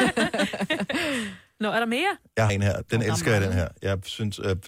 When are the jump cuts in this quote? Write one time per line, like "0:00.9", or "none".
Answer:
0:02.5